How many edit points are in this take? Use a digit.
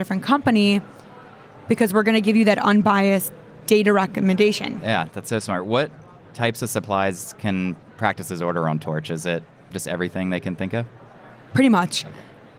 0